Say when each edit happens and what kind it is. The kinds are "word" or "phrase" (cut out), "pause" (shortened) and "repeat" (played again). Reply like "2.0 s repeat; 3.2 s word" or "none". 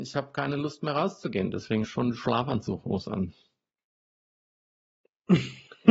1.8 s word